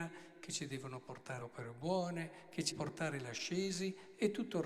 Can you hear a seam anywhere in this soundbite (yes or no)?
yes